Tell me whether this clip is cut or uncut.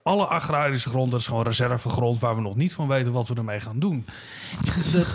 uncut